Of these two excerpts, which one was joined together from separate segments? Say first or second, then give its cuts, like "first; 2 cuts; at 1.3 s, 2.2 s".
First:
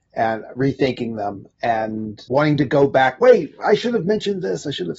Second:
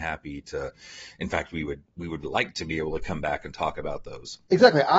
second; 2 cuts; at 1.9 s, 2.2 s